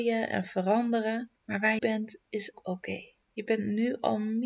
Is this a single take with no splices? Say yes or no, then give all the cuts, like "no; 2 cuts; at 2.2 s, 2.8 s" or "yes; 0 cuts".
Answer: no; 4 cuts; at 1.4 s, 1.8 s, 2.5 s, 3.2 s